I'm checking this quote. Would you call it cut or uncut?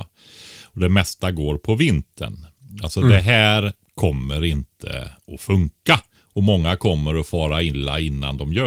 cut